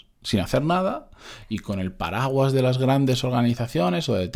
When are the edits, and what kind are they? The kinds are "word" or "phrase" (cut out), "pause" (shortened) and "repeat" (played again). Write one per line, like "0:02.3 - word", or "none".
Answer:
none